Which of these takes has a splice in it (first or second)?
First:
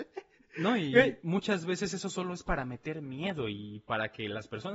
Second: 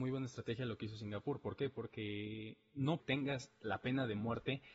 second